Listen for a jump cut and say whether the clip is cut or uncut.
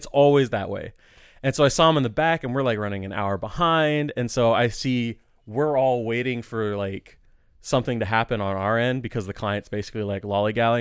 uncut